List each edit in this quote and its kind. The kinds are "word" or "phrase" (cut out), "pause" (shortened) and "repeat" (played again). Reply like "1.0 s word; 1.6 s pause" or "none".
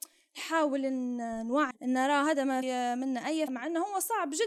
1.7 s word; 2.6 s word; 3.5 s word